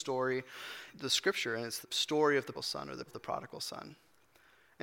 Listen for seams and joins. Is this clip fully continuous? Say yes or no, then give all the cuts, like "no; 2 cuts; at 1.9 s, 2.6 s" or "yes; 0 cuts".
no; 4 cuts; at 0.9 s, 1.8 s, 2.5 s, 3.1 s